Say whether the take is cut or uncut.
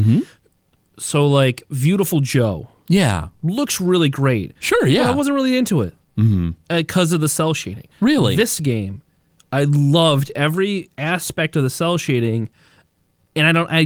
cut